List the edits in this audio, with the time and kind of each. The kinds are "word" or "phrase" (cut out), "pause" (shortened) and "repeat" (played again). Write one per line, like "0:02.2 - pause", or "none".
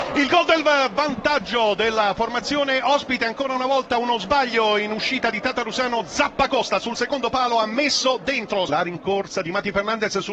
none